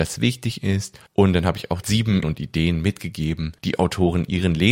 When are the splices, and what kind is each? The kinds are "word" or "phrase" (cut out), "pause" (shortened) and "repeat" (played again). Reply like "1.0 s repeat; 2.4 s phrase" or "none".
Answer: 1.1 s pause; 1.8 s word; 2.2 s word; 3.6 s pause